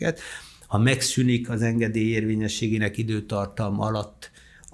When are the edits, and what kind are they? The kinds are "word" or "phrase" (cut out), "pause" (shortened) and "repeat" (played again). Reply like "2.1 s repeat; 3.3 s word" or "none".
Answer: none

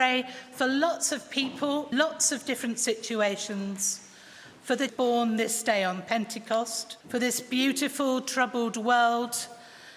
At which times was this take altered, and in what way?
1.9 s word; 4.9 s phrase; 7.0 s pause

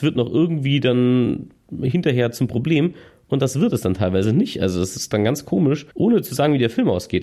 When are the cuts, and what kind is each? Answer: 5.9 s pause

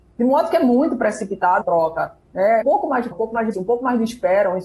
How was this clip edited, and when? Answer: 1.6 s phrase; 2.6 s word; 3.1 s word; 3.5 s word

